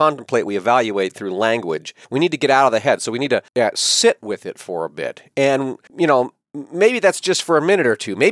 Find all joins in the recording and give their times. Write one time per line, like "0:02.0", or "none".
0:02.0
0:03.5
0:05.9